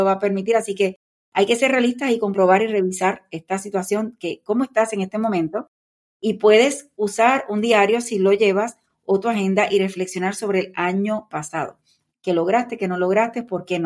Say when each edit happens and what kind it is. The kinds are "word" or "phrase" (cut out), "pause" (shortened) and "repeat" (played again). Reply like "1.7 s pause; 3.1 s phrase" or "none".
none